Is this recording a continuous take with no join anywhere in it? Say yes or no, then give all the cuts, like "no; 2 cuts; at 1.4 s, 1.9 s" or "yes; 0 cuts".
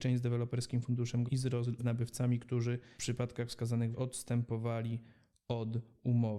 no; 4 cuts; at 1.3 s, 1.8 s, 3.0 s, 3.9 s